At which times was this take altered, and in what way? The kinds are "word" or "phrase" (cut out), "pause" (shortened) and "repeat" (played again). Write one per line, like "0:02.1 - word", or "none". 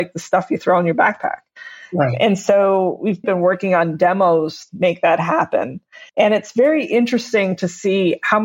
0:03.2 - word
0:04.7 - phrase
0:06.1 - pause